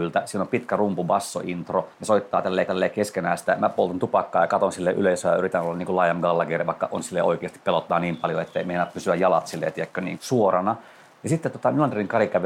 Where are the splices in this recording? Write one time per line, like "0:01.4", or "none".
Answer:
0:01.9
0:02.7
0:10.2